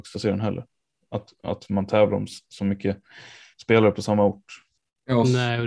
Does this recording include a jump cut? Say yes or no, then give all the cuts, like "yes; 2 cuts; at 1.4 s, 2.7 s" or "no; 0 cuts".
no; 0 cuts